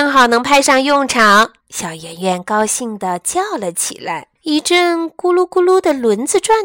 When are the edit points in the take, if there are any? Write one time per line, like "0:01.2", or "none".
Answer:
0:01.6
0:04.4